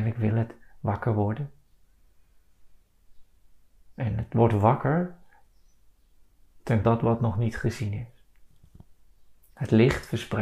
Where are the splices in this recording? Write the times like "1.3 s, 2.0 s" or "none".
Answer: 6.8 s

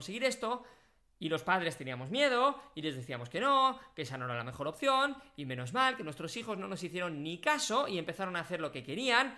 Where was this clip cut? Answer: none

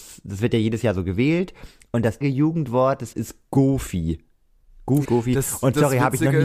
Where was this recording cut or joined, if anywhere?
2.2 s, 3.1 s, 5.0 s

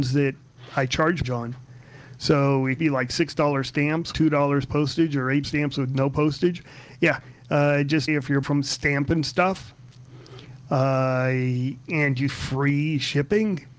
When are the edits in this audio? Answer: 1.2 s, 2.8 s, 4.1 s, 5.4 s, 8.1 s, 8.4 s, 12.3 s

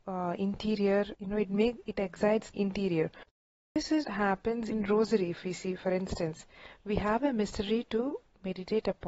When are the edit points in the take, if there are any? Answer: 1.1 s, 2.5 s, 3.7 s, 4.0 s, 4.7 s

